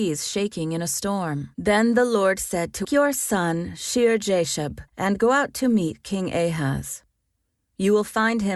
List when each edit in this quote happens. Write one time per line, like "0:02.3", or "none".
0:01.5
0:02.8
0:04.9